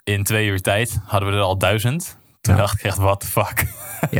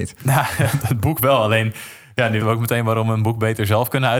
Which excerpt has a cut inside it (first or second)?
second